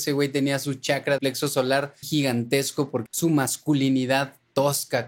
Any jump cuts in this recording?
yes; 3 cuts; at 1.2 s, 2.0 s, 3.1 s

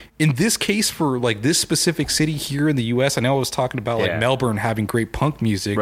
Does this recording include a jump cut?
no; 0 cuts

